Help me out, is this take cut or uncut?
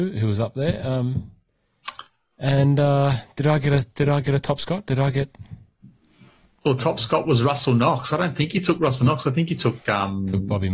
uncut